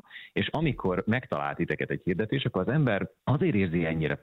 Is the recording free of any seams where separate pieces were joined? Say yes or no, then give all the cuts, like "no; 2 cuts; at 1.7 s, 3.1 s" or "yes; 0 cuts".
no; 1 cut; at 3.2 s